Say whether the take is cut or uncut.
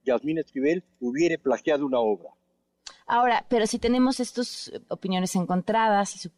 cut